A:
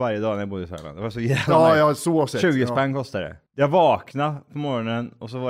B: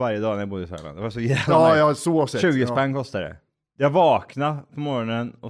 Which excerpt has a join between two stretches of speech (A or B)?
A